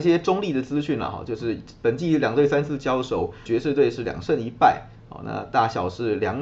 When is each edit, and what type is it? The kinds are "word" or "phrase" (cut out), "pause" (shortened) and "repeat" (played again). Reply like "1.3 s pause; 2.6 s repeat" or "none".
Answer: 3.5 s word